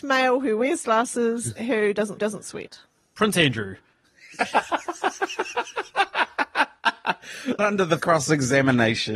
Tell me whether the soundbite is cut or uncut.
cut